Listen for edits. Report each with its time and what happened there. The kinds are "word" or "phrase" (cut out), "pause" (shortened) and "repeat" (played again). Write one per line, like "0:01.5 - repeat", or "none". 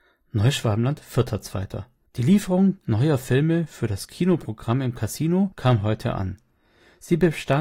0:02.1 - pause